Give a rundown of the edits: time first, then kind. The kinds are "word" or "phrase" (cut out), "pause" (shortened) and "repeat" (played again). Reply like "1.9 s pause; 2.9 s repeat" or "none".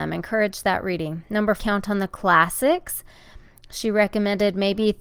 1.6 s word

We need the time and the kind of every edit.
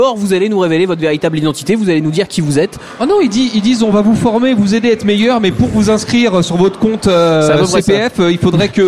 none

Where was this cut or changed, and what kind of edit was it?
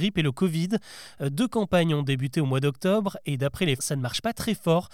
3.8 s word

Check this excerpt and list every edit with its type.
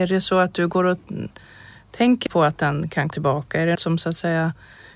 2.3 s word; 3.1 s word; 3.8 s word

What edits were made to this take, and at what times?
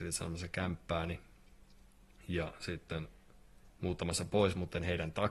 none

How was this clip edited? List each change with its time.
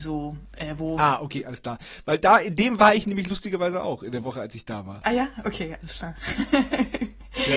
none

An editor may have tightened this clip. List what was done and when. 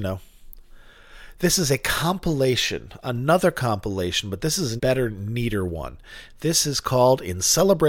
4.8 s word

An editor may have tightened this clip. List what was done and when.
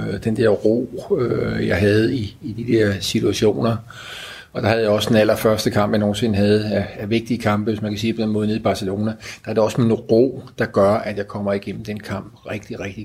none

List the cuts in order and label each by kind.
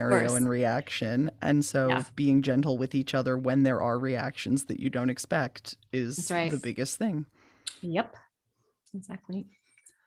none

